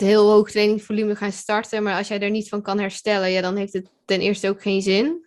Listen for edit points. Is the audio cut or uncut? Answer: uncut